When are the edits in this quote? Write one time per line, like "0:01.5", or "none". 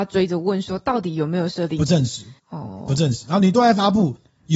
0:02.4

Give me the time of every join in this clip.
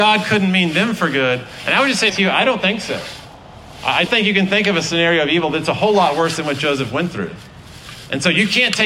0:02.1
0:04.1

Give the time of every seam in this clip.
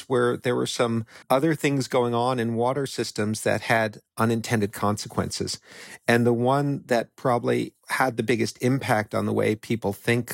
0:01.2

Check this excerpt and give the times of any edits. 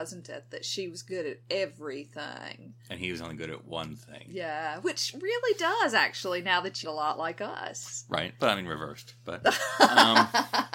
0:02.8
0:06.8

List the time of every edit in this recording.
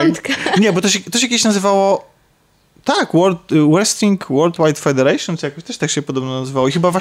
none

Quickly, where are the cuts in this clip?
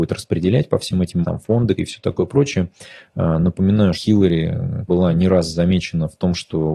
0:01.2
0:01.8
0:03.9
0:04.9

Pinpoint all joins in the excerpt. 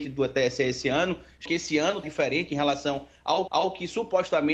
0:01.5
0:02.0
0:03.5

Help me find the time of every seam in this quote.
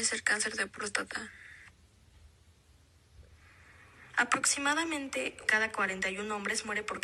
0:05.5

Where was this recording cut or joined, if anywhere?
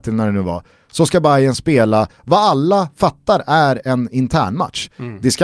none

